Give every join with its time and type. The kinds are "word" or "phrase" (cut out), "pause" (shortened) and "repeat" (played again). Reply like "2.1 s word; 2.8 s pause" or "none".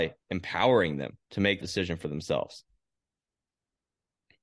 1.2 s pause; 1.6 s word